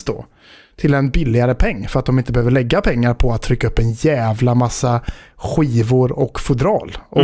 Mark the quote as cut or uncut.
uncut